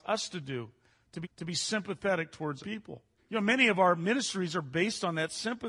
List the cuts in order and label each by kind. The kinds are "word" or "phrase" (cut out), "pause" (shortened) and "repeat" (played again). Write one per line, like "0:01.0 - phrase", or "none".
0:01.2 - repeat
0:02.6 - word
0:03.2 - pause